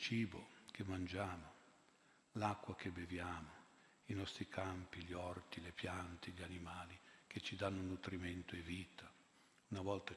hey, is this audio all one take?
yes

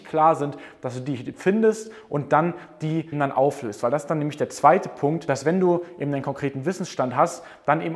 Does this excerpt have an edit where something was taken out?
yes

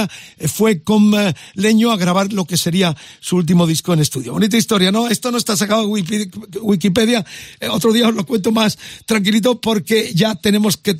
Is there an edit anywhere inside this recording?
no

